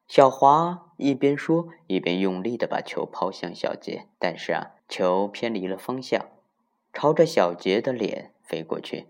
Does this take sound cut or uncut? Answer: cut